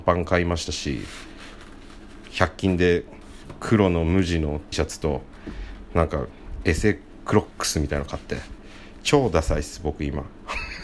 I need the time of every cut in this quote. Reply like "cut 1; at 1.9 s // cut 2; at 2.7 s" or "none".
cut 1; at 4.7 s